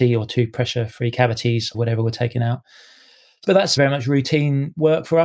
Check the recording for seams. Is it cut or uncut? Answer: cut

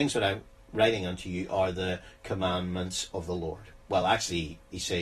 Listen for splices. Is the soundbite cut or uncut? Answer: uncut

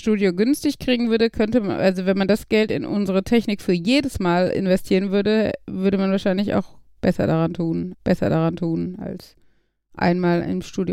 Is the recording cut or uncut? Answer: cut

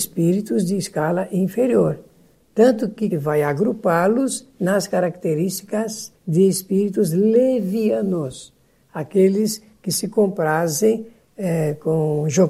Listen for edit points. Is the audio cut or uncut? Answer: cut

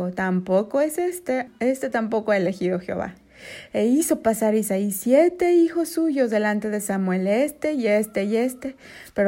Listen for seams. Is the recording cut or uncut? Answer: cut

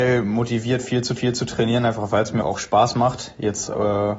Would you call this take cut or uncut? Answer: cut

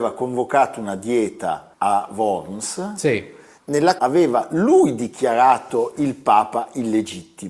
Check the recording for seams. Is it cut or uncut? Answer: cut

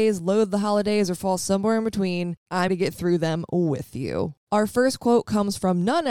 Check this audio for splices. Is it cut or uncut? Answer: cut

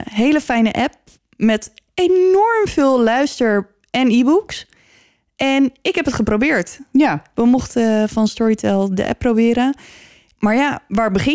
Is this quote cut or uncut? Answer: uncut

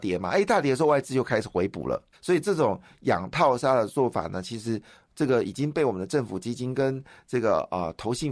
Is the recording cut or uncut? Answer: cut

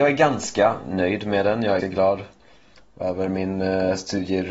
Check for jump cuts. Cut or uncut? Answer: cut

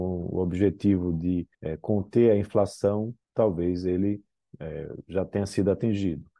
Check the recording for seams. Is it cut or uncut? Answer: cut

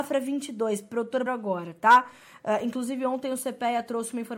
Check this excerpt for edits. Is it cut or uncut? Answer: cut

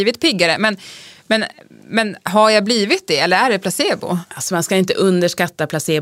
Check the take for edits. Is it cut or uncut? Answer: uncut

